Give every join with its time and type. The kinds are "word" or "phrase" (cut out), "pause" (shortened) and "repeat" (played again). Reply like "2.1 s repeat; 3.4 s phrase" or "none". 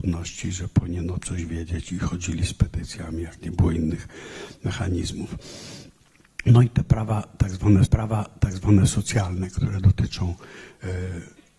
1.2 s word; 7.9 s repeat